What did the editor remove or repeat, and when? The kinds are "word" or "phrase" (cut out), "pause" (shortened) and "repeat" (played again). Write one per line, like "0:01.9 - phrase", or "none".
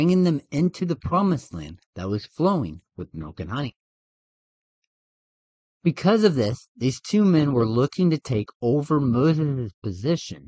0:01.8 - pause